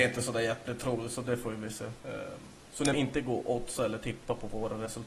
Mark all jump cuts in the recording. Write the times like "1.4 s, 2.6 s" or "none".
2.0 s, 2.9 s